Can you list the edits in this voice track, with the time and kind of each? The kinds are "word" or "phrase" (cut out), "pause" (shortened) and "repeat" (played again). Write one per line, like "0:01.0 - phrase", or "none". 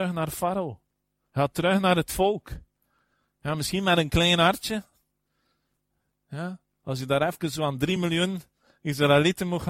none